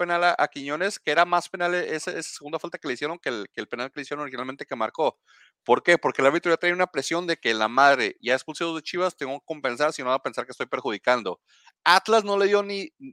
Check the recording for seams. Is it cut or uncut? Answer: uncut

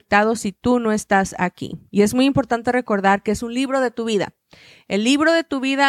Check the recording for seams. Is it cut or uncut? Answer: uncut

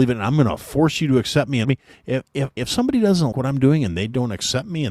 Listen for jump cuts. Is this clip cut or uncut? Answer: cut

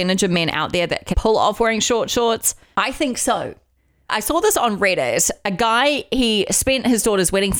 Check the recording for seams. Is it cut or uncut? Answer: cut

